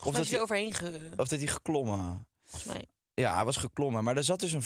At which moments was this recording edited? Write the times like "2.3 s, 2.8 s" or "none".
none